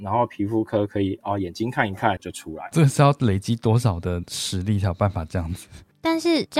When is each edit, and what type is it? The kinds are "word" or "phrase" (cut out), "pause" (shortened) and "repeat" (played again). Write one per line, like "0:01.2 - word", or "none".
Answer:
0:02.2 - phrase